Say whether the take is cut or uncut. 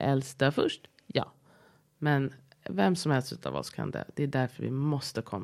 uncut